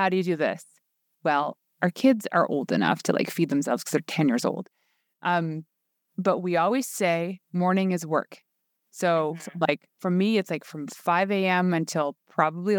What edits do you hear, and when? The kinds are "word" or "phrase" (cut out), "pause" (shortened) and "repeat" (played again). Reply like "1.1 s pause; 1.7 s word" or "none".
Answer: none